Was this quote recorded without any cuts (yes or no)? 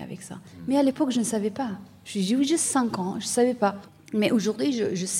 no